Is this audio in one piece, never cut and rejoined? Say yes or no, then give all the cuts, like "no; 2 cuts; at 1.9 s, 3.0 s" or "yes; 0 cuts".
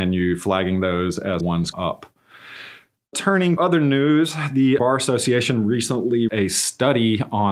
no; 5 cuts; at 1.4 s, 1.7 s, 3.6 s, 4.8 s, 6.3 s